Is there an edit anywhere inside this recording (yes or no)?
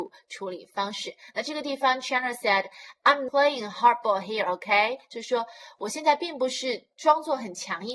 yes